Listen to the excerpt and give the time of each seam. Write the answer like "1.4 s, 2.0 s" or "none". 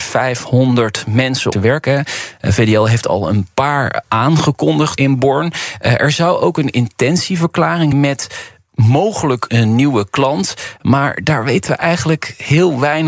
1.5 s, 4.0 s, 5.0 s, 7.9 s, 9.5 s